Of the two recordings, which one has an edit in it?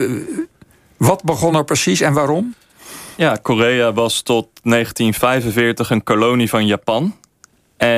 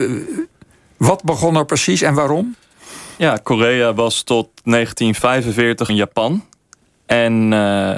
second; 1 cut; at 5.9 s

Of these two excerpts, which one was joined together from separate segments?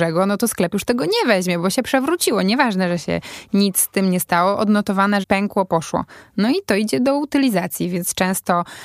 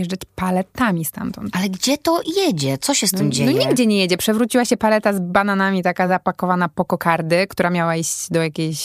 first; 1 cut; at 5.2 s

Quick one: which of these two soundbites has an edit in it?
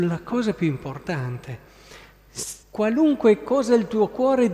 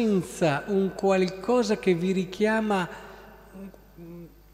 first; 1 cut; at 2.6 s

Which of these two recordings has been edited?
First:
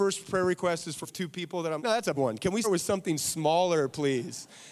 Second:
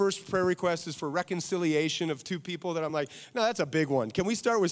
first; 4 cuts; at 1.0 s, 1.8 s, 2.1 s, 2.6 s

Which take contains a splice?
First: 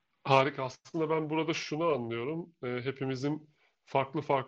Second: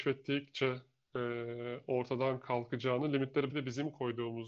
second; 1 cut; at 3.5 s

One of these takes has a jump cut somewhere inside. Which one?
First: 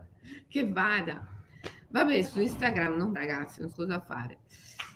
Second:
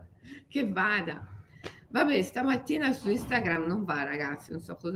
first; 3 cuts; at 2.2 s, 3.1 s, 3.7 s

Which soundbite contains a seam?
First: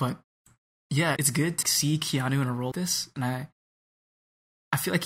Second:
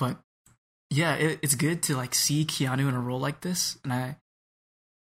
first; 3 cuts; at 1.2 s, 1.6 s, 2.7 s

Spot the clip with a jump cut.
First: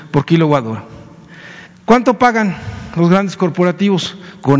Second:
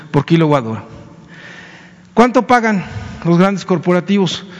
first; 1 cut; at 1.7 s

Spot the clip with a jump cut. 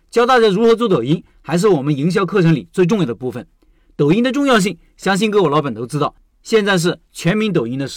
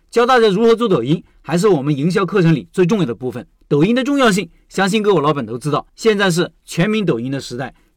second; 2 cuts; at 3.6 s, 5.9 s

